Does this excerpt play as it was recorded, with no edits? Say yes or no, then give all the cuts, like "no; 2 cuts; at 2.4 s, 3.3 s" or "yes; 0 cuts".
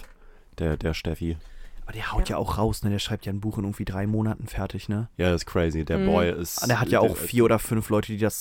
yes; 0 cuts